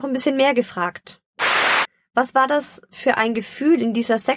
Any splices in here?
no; 0 cuts

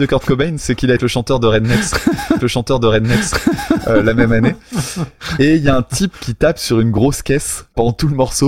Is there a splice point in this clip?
yes; 2 cuts; at 1.0 s, 2.4 s

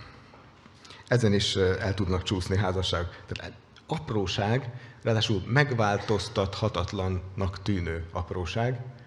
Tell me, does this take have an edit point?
no; 0 cuts

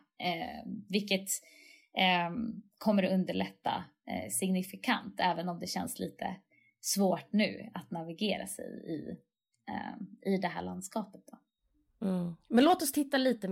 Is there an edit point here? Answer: no; 0 cuts

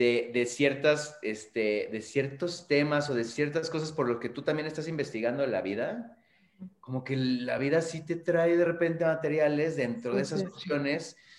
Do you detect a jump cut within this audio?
no; 0 cuts

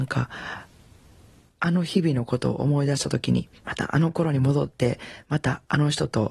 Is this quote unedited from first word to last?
no; 1 cut; at 3.6 s

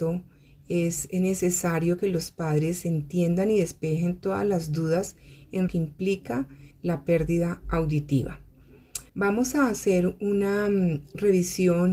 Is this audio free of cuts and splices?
no; 3 cuts; at 5.7 s, 6.7 s, 9.1 s

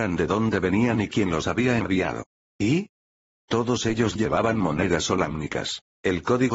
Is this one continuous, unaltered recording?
yes; 0 cuts

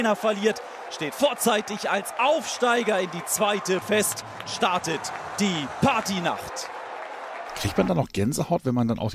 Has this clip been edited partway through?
yes; 3 cuts; at 1.1 s, 3.8 s, 4.5 s

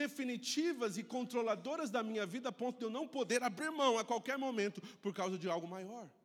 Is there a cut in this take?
no; 0 cuts

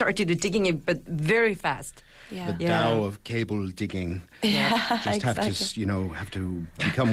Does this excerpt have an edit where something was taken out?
no; 0 cuts

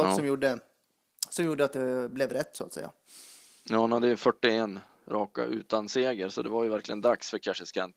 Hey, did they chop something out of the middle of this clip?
no; 0 cuts

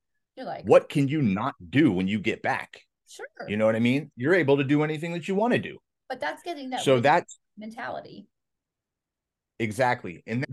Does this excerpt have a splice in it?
no; 0 cuts

